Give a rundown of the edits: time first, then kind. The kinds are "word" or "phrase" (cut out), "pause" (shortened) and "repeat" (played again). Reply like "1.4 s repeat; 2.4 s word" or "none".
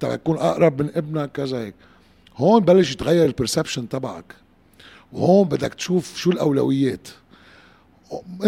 none

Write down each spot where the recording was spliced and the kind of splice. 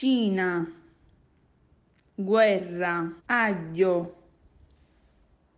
3.2 s pause

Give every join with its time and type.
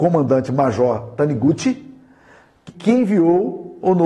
2.7 s word

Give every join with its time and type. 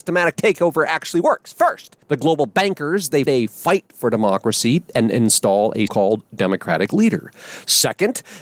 2.0 s pause; 3.3 s word; 5.9 s word

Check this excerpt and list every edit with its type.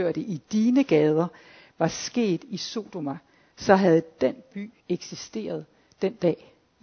4.8 s pause

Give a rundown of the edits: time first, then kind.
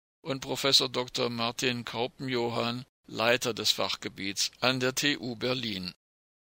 2.9 s pause

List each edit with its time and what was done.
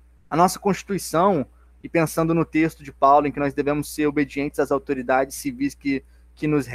none

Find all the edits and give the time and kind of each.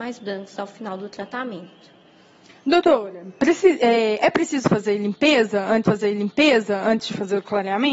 5.9 s repeat

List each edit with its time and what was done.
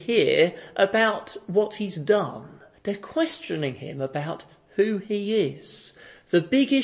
2.7 s pause

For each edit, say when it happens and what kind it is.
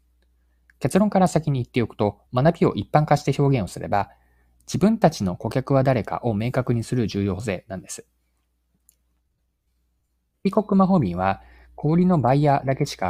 2.3 s pause

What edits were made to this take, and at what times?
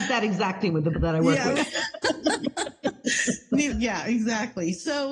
0.9 s word; 1.6 s word; 3.7 s word

